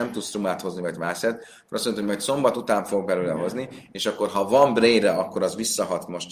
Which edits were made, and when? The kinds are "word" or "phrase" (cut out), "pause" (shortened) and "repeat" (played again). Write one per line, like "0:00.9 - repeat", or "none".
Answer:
none

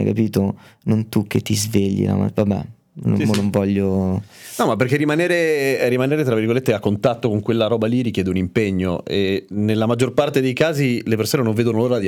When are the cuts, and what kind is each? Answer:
none

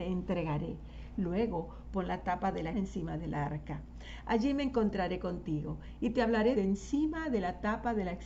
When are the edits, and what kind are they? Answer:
0:02.7 - word
0:06.6 - word

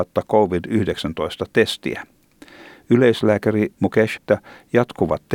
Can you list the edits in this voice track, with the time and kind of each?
0:04.2 - phrase

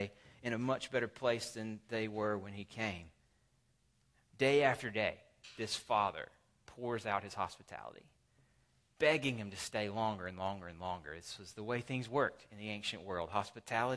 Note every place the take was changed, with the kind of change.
none

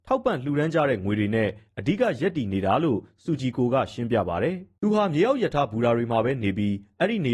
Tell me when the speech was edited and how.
0:04.8 - pause

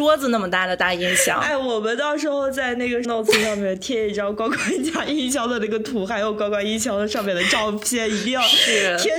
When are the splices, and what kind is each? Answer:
0:03.0 - word

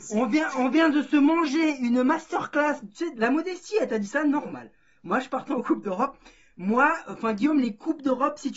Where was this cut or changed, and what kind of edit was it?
none

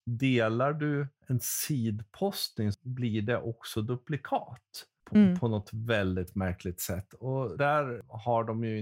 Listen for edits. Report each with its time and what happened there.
0:07.6 - word

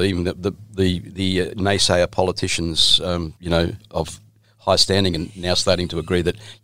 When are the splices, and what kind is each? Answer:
0:03.4 - pause

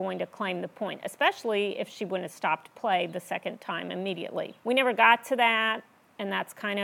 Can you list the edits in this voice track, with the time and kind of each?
0:04.6 - pause

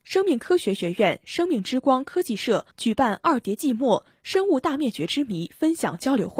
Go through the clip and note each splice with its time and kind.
0:02.7 - pause

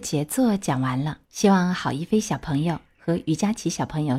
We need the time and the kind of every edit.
0:01.2 - pause

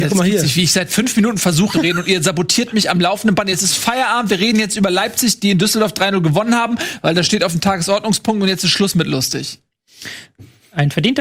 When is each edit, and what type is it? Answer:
0:01.7 - phrase

